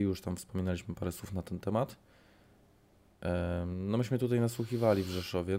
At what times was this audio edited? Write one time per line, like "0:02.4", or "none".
none